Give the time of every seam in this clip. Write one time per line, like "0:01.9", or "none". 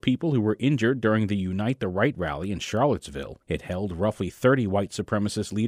0:03.4